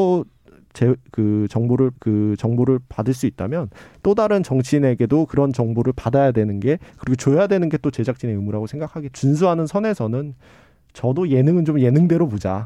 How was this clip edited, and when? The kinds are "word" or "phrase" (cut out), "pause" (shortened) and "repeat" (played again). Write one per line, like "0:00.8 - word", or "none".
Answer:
0:02.0 - repeat
0:09.1 - phrase